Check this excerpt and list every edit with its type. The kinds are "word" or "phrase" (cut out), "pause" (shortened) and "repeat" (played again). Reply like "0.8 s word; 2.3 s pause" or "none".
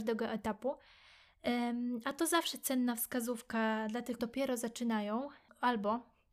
4.2 s word